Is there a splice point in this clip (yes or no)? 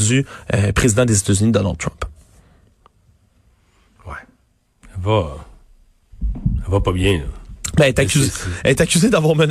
no